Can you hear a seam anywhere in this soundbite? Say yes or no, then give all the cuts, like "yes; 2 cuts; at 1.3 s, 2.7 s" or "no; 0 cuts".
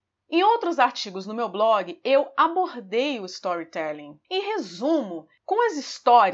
yes; 1 cut; at 4.2 s